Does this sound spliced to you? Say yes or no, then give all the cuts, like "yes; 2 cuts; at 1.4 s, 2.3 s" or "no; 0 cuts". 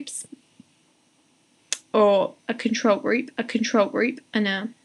yes; 1 cut; at 3.4 s